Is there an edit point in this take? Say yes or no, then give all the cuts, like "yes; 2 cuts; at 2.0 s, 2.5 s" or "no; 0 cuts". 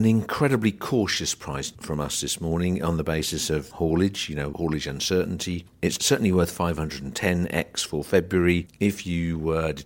yes; 1 cut; at 5.7 s